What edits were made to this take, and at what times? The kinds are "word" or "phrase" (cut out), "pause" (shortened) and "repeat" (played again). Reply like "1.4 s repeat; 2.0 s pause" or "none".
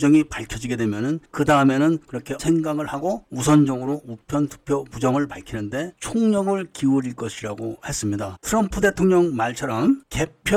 2.4 s phrase